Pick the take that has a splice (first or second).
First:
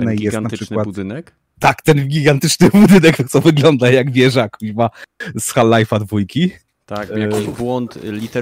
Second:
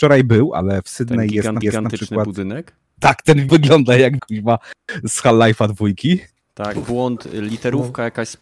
second